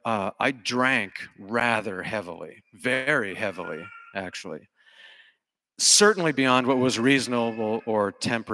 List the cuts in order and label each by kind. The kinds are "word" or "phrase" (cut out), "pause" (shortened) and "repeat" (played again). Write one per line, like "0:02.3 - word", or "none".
none